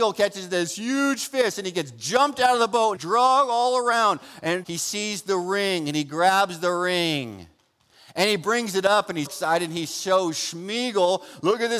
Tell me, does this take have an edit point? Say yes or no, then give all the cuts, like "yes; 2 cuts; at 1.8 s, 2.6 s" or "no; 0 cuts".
yes; 3 cuts; at 3.0 s, 4.6 s, 9.3 s